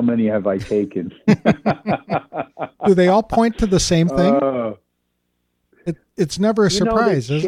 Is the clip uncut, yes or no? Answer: yes